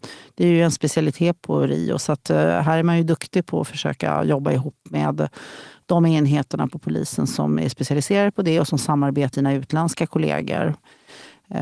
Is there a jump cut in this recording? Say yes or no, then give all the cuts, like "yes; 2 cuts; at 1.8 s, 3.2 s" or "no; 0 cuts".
yes; 2 cuts; at 1.4 s, 9.3 s